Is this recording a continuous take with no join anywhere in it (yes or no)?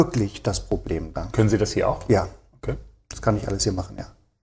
yes